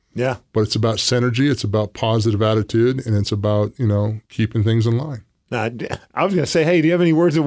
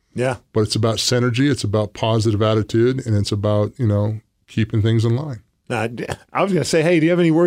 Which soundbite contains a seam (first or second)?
first